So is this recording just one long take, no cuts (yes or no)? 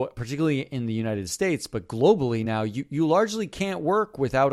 yes